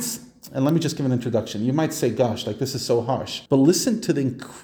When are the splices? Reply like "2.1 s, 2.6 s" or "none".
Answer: 3.5 s